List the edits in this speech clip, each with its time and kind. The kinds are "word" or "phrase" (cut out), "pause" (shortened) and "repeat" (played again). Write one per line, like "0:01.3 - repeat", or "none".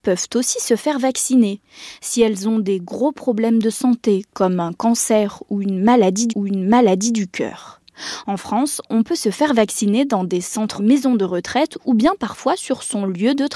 0:06.3 - repeat
0:10.8 - phrase